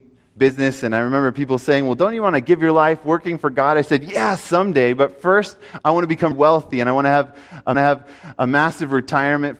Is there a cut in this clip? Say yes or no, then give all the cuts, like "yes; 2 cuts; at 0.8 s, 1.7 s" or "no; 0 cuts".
yes; 2 cuts; at 6.3 s, 7.7 s